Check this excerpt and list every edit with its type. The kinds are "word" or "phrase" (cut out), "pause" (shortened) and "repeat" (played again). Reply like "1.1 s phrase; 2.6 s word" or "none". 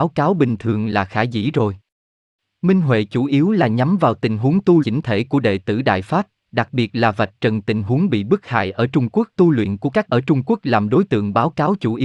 4.8 s word; 9.4 s phrase; 10.1 s phrase